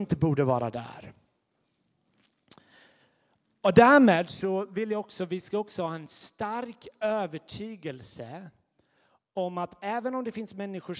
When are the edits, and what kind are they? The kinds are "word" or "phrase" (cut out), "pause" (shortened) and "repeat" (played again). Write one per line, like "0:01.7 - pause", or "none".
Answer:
none